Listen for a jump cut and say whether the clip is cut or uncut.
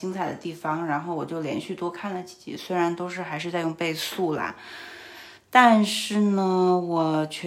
uncut